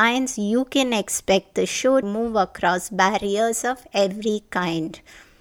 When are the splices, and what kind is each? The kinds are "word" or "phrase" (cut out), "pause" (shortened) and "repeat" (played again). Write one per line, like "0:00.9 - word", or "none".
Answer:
0:02.0 - word